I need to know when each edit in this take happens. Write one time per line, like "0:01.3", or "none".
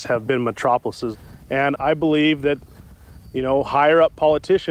0:01.8